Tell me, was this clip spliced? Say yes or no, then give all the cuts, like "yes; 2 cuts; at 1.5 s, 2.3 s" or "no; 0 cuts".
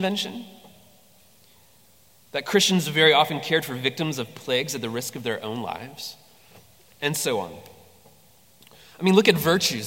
no; 0 cuts